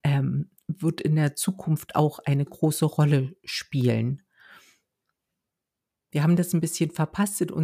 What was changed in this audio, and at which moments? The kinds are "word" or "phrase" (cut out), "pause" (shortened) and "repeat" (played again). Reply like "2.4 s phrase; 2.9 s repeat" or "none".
2.5 s word